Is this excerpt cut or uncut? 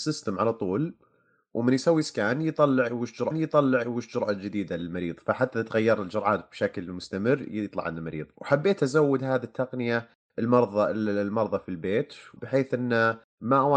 cut